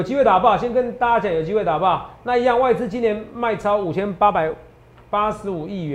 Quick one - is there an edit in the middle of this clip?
no; 0 cuts

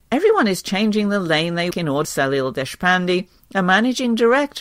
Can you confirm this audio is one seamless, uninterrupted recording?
no; 2 cuts; at 1.7 s, 2.0 s

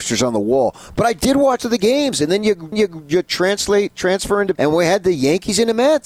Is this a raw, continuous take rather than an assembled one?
no; 3 cuts; at 1.6 s, 2.7 s, 4.6 s

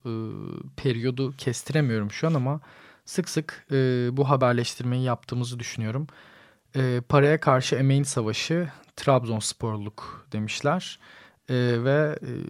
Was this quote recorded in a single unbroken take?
yes; 0 cuts

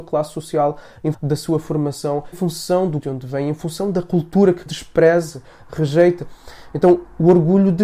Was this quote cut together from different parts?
yes; 4 cuts; at 1.1 s, 2.3 s, 3.0 s, 4.7 s

